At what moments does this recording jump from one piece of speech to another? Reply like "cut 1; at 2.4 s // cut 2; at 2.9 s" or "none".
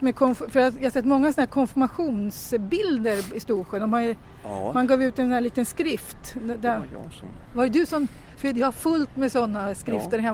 none